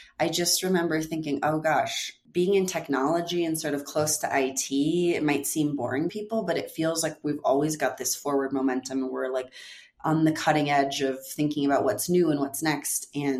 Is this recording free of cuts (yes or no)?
no